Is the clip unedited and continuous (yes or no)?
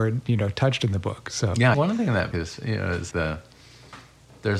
no